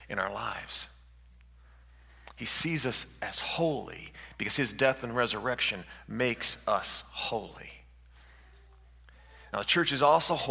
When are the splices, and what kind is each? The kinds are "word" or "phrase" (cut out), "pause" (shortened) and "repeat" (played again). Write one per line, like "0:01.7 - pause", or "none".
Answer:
none